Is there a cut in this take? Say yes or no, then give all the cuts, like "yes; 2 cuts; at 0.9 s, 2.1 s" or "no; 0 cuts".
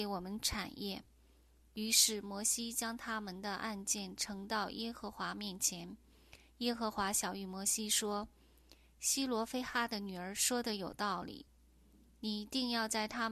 no; 0 cuts